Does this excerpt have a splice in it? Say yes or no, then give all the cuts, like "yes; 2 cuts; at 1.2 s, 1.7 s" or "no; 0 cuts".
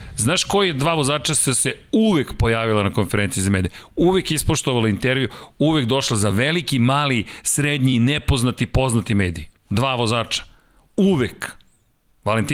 no; 0 cuts